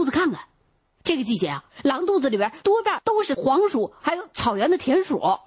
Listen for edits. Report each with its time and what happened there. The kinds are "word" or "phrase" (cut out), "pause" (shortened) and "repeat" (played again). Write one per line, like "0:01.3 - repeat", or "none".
0:01.7 - pause